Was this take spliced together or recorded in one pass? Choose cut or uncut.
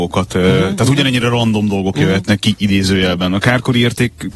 uncut